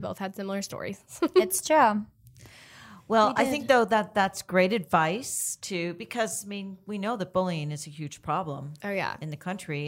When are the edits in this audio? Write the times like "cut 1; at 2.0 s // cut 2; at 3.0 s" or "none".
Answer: none